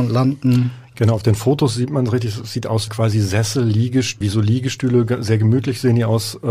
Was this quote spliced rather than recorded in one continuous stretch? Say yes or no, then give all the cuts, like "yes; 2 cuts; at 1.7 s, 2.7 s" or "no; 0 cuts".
yes; 2 cuts; at 2.9 s, 4.2 s